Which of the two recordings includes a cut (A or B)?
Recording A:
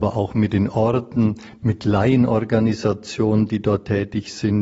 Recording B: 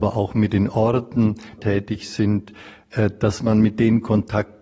B